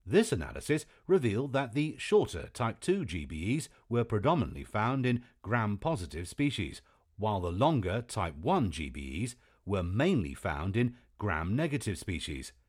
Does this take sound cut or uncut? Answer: uncut